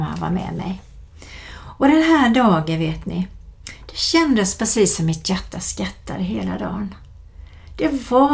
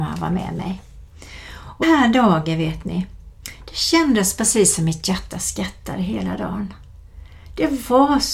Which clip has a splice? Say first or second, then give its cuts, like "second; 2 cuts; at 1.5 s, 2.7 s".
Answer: second; 1 cut; at 1.8 s